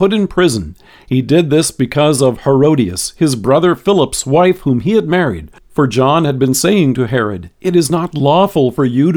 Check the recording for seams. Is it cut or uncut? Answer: uncut